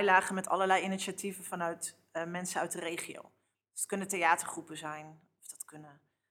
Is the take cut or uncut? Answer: uncut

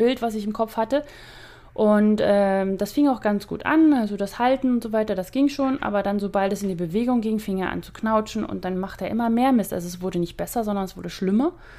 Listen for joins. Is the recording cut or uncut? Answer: uncut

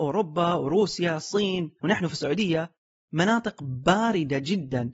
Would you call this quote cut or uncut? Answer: uncut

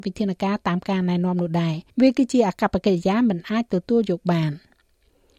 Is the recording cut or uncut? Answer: cut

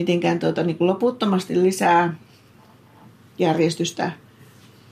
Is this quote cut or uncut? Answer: uncut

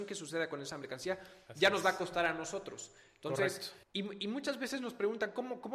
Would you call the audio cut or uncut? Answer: cut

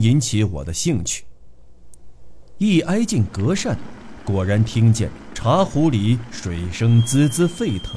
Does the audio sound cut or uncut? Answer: uncut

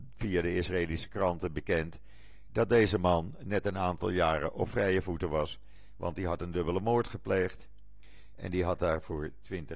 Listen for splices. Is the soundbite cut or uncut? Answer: uncut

